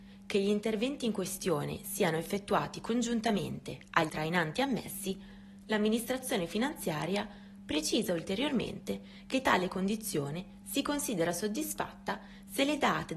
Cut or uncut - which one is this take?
cut